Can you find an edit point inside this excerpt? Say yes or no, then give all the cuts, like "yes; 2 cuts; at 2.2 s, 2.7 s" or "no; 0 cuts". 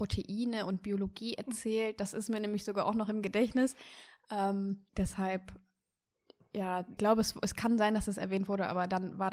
yes; 2 cuts; at 4.9 s, 7.0 s